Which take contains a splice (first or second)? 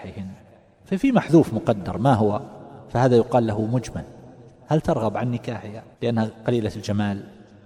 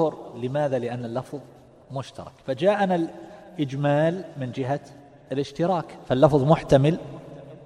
first